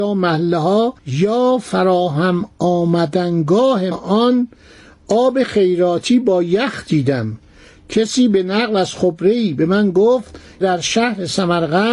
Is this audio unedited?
no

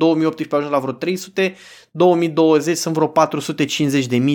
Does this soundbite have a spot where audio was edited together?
no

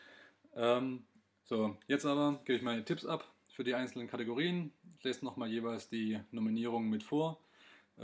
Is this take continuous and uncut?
yes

